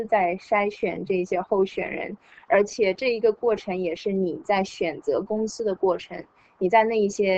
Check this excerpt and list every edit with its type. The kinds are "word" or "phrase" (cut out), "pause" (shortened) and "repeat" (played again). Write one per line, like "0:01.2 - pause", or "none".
none